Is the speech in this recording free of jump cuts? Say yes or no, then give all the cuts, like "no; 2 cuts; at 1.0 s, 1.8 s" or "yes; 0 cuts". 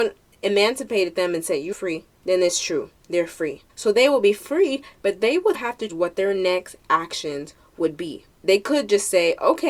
no; 6 cuts; at 1.7 s, 2.2 s, 3.7 s, 5.5 s, 5.9 s, 8.3 s